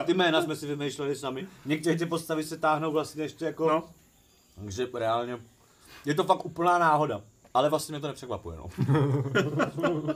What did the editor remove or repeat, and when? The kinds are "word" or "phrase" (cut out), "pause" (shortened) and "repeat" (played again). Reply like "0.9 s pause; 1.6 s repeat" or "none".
none